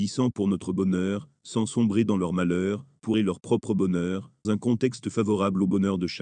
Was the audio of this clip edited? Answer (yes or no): yes